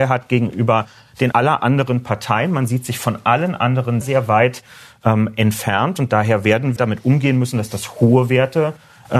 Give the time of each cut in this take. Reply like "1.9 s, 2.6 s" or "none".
1.3 s, 4.0 s, 6.8 s